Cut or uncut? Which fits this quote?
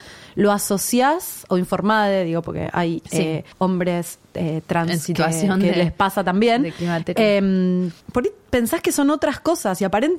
cut